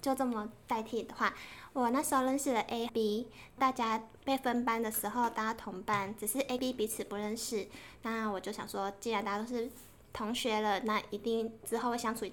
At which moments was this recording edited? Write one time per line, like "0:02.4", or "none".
0:02.9
0:06.6